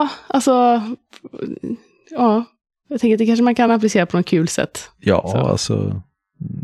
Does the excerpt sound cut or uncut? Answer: uncut